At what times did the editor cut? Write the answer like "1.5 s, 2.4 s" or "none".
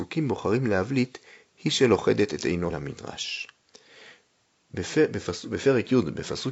2.7 s